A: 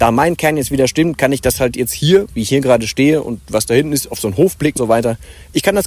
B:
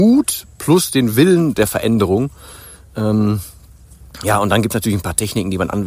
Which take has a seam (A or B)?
A